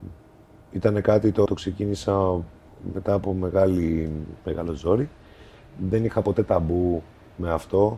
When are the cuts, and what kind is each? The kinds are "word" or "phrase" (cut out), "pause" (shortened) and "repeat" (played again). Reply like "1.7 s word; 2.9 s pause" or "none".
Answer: 1.5 s word; 4.4 s pause